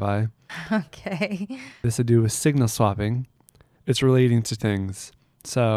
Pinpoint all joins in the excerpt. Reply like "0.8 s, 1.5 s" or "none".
2.0 s, 3.8 s, 4.6 s